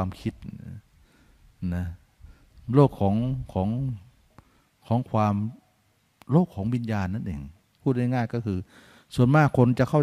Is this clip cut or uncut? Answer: cut